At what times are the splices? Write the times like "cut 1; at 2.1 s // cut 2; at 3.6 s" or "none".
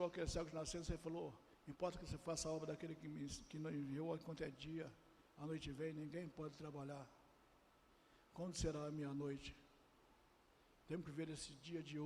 none